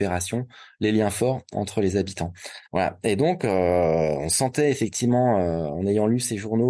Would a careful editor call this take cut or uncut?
cut